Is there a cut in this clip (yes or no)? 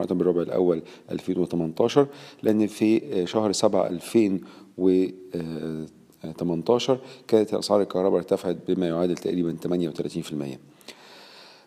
no